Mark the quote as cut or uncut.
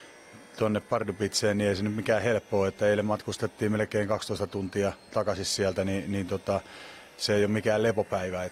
uncut